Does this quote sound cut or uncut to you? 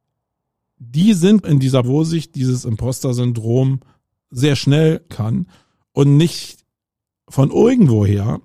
cut